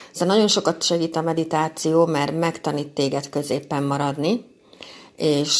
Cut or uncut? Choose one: uncut